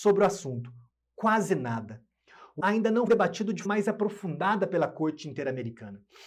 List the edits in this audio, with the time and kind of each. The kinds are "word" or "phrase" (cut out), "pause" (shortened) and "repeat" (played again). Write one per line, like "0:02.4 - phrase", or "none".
0:02.6 - word
0:03.1 - word
0:03.7 - word